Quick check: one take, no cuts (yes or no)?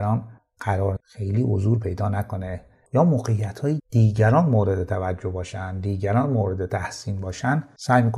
no